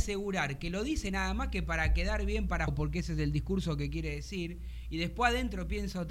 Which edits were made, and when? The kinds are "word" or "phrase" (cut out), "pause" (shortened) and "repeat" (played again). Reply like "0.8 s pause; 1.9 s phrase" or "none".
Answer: 2.7 s word

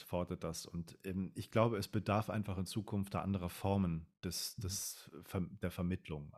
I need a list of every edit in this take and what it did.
none

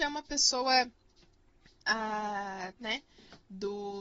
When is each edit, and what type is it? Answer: 2.8 s word

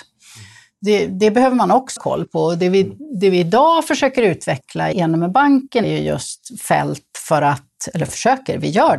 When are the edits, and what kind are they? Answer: 2.0 s word; 4.9 s word; 5.8 s word

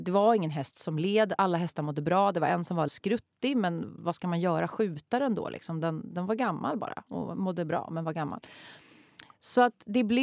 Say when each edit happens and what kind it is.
2.9 s phrase

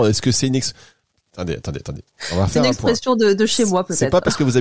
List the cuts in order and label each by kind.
none

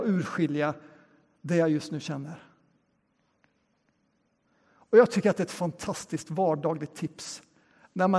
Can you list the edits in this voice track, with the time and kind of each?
none

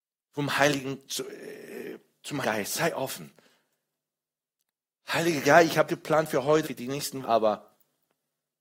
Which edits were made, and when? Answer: 2.4 s word; 5.4 s word; 5.9 s word; 6.6 s word; 7.2 s word

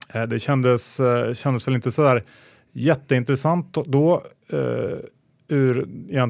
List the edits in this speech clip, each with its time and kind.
none

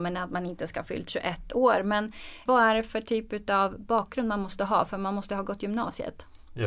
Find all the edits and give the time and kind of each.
2.5 s word

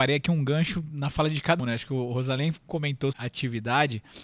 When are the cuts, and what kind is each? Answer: 1.6 s word; 3.1 s word

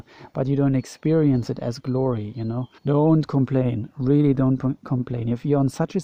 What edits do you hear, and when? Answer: 2.8 s pause

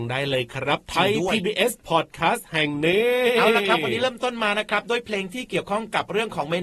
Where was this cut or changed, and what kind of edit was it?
none

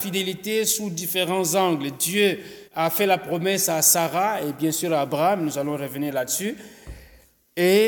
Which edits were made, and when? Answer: 2.7 s pause

